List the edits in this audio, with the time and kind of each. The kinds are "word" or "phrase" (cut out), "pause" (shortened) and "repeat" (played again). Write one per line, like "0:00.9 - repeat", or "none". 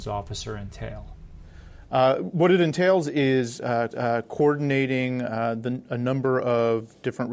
0:03.9 - repeat